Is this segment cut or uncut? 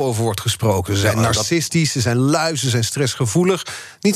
uncut